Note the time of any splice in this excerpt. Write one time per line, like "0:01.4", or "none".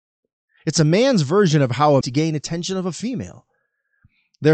0:02.0